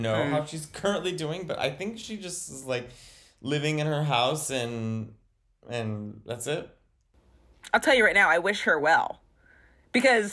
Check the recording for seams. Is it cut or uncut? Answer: uncut